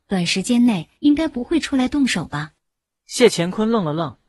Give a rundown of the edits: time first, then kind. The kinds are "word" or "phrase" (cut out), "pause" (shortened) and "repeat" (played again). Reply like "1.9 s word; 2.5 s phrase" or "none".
1.0 s pause; 2.6 s pause